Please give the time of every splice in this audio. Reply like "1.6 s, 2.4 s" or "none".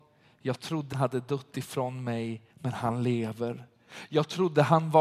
0.9 s, 2.5 s